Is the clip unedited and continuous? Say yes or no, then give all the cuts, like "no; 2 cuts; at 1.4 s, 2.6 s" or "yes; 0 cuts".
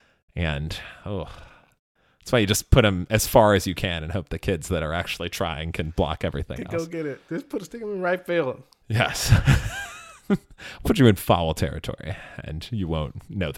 no; 1 cut; at 10.8 s